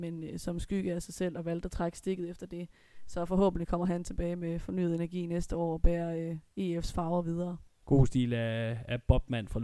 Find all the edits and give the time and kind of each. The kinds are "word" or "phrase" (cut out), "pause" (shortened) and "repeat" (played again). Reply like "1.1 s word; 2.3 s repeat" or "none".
7.7 s pause